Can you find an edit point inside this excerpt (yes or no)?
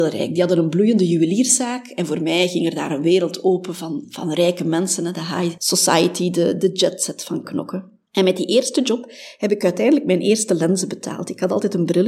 yes